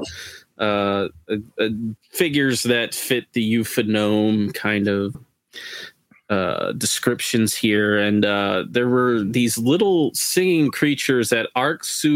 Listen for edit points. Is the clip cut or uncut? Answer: cut